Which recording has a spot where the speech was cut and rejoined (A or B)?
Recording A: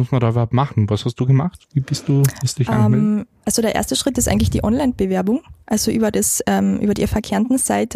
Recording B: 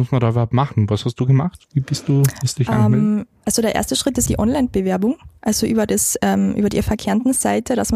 B